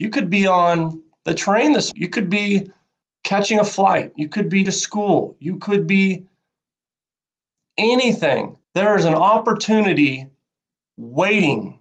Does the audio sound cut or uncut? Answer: cut